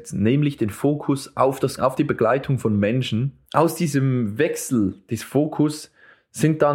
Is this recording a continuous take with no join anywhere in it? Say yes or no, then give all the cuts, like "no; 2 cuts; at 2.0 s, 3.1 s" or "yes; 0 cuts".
no; 2 cuts; at 1.8 s, 3.4 s